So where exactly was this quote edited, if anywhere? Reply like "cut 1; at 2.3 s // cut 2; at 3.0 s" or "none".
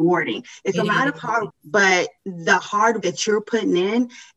cut 1; at 1.5 s // cut 2; at 2.2 s // cut 3; at 3.0 s